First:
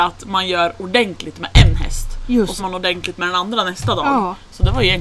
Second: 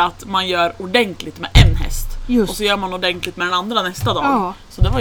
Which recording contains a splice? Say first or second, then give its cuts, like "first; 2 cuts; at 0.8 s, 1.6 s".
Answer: first; 1 cut; at 2.6 s